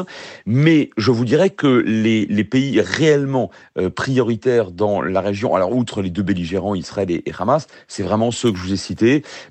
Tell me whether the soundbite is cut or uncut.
uncut